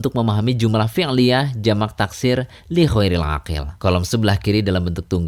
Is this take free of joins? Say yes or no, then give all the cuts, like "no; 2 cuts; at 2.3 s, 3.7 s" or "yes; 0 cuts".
no; 1 cut; at 3.8 s